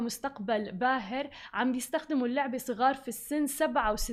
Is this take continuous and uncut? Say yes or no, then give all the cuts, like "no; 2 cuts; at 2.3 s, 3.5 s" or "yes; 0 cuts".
yes; 0 cuts